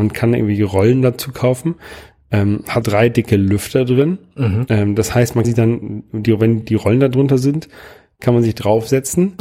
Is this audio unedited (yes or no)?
no